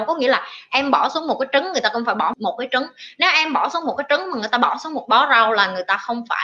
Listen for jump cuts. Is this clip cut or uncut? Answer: uncut